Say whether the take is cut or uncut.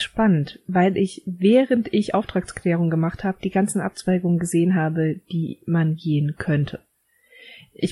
uncut